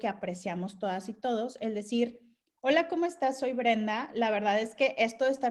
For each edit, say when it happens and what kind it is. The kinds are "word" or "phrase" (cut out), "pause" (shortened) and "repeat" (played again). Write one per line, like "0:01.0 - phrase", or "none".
0:02.4 - pause